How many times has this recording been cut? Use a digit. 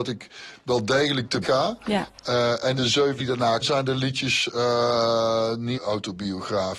5